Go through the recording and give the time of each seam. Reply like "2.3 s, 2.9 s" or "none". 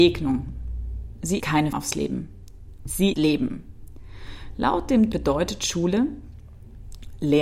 1.4 s, 1.7 s, 3.1 s, 5.1 s